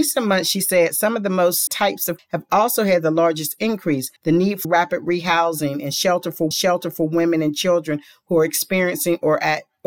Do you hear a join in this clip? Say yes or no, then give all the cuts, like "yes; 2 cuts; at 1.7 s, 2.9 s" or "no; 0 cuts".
yes; 5 cuts; at 1.7 s, 2.2 s, 4.2 s, 4.6 s, 6.5 s